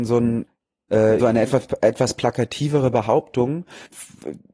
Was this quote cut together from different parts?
yes; 1 cut; at 1.2 s

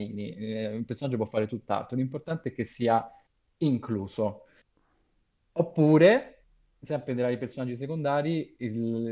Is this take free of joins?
yes; 0 cuts

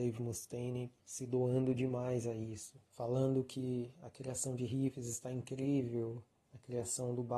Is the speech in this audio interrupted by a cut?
yes; 2 cuts; at 1.0 s, 2.9 s

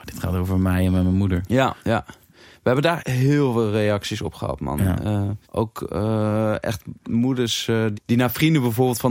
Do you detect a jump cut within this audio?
yes; 4 cuts; at 1.8 s, 3.0 s, 5.4 s, 7.9 s

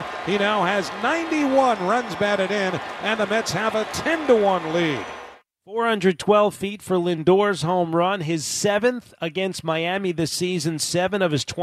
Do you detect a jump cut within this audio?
no; 0 cuts

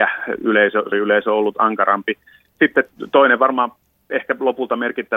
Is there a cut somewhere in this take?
yes; 1 cut; at 0.9 s

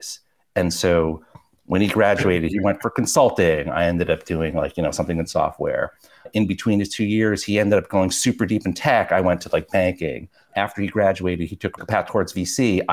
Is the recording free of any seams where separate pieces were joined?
yes; 0 cuts

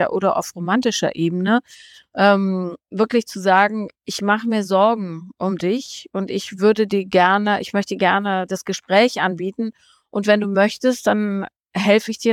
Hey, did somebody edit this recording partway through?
yes; 1 cut; at 2.8 s

